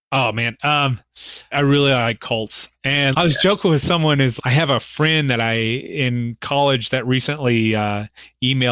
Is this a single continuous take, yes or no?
no